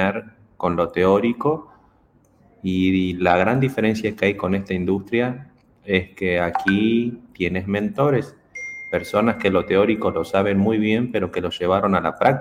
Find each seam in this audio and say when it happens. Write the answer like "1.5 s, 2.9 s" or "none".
none